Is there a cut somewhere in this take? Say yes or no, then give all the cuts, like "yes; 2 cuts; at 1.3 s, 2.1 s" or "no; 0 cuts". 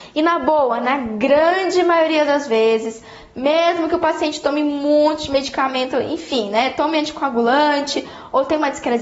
no; 0 cuts